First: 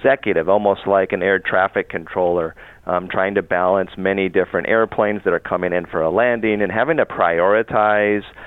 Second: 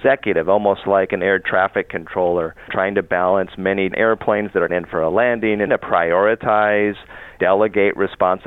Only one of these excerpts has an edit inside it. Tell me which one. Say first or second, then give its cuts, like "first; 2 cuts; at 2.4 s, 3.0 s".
second; 5 cuts; at 2.7 s, 3.9 s, 4.7 s, 5.7 s, 7.4 s